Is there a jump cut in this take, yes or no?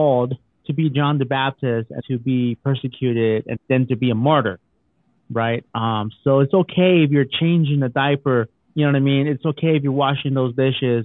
yes